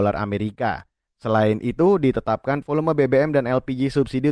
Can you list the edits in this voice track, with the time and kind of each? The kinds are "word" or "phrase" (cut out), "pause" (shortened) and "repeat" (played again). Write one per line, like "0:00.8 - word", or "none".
0:02.6 - word